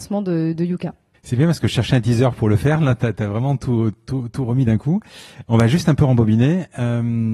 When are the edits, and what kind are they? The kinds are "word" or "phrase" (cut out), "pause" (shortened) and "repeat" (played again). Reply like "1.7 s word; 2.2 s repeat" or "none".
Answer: 1.1 s pause